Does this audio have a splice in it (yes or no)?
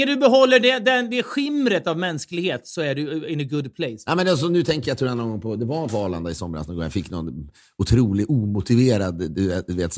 no